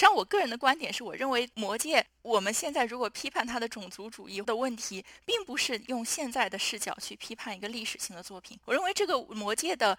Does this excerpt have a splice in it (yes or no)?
yes